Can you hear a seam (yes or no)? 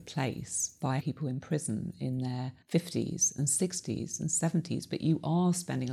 yes